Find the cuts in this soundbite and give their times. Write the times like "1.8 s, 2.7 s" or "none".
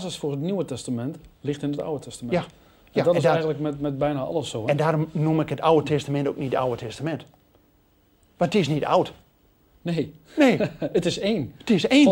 none